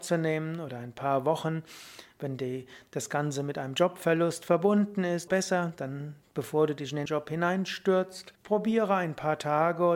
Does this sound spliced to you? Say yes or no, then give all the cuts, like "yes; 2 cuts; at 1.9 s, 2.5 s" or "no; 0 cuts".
yes; 3 cuts; at 5.3 s, 7.1 s, 8.3 s